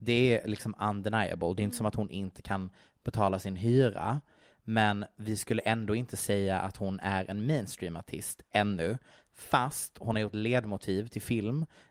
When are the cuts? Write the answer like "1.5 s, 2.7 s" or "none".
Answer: none